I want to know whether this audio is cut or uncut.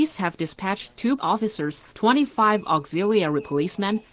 cut